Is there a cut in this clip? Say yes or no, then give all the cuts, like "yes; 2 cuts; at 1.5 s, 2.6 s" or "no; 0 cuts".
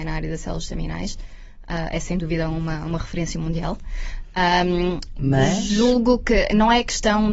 no; 0 cuts